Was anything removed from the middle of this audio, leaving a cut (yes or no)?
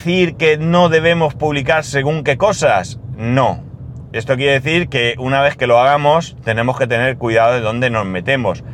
no